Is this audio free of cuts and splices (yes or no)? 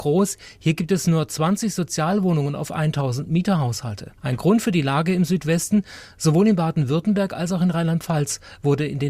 no